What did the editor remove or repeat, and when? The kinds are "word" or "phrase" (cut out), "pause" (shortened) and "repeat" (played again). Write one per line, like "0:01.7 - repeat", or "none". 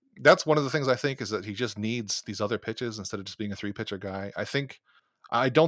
none